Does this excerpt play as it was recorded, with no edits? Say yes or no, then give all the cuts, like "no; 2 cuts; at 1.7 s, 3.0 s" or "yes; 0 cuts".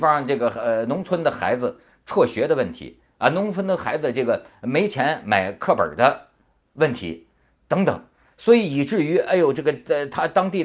yes; 0 cuts